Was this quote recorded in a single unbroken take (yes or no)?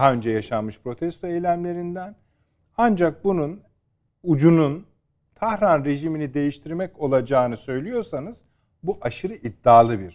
yes